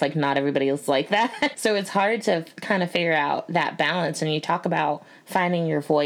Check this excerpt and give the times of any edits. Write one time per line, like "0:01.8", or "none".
0:01.5